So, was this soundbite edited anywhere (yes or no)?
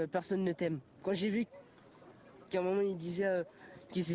no